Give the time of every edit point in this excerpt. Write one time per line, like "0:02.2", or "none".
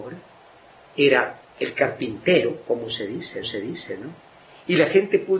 0:01.5
0:03.4

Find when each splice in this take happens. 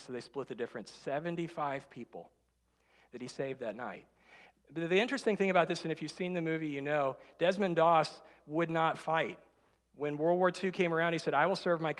none

